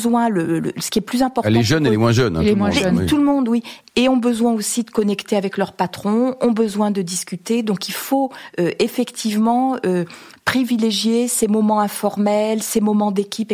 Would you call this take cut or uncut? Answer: uncut